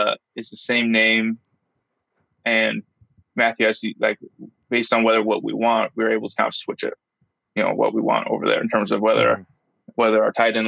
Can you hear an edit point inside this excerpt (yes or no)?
yes